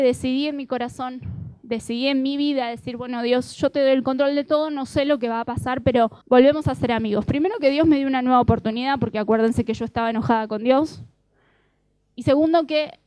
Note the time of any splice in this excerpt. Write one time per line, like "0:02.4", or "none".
0:06.2